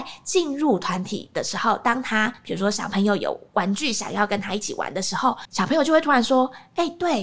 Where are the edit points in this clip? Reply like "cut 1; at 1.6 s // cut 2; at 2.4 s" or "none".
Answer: cut 1; at 5.4 s